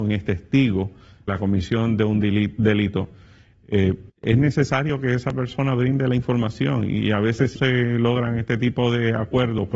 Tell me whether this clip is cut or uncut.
cut